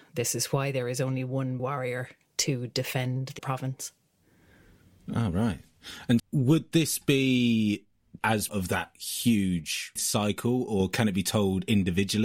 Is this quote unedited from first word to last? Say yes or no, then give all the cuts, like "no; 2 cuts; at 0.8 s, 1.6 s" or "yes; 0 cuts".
no; 6 cuts; at 1.6 s, 3.4 s, 6.2 s, 8.2 s, 8.5 s, 10.0 s